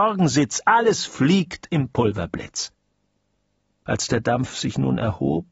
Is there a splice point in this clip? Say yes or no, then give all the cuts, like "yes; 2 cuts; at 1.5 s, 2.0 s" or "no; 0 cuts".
no; 0 cuts